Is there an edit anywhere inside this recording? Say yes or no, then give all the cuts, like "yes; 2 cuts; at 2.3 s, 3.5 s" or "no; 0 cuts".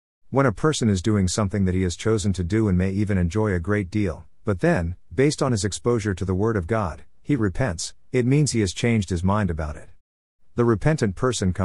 no; 0 cuts